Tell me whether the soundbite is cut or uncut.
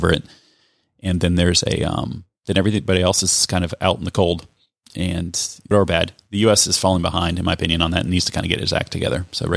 cut